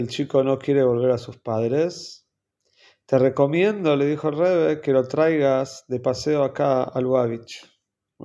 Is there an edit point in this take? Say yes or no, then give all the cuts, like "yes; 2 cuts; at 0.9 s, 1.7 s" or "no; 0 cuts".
no; 0 cuts